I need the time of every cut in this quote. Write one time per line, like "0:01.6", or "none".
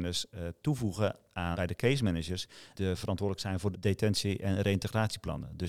0:01.5
0:02.7
0:03.7